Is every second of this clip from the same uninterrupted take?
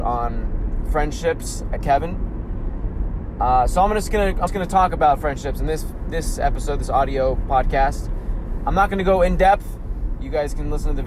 no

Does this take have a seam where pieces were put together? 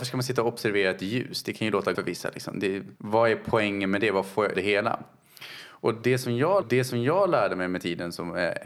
yes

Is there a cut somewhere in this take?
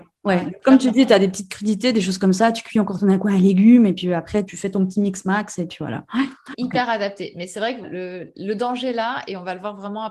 yes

